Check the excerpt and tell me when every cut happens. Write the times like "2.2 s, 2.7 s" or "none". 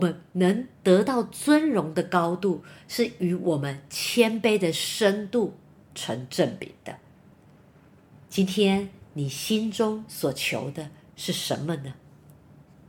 none

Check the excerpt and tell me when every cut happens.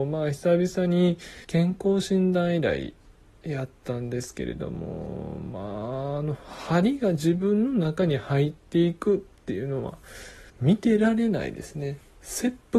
1.4 s, 10.5 s

